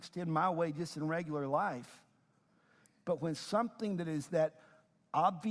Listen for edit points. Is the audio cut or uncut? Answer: uncut